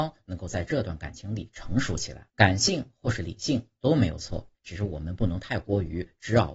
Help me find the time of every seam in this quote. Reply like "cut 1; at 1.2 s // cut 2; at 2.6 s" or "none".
cut 1; at 2.3 s // cut 2; at 4.5 s